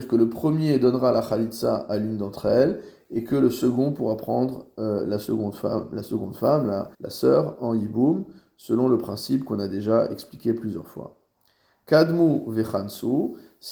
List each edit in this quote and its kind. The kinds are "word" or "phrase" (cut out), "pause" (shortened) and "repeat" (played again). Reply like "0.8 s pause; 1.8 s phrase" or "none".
6.9 s pause